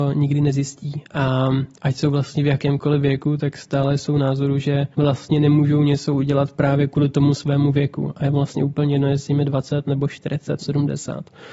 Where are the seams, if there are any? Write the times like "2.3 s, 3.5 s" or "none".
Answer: 1.7 s, 4.9 s, 10.6 s